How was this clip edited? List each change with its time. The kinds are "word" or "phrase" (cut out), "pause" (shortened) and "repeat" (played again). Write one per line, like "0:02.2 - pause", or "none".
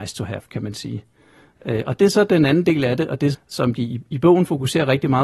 0:03.3 - word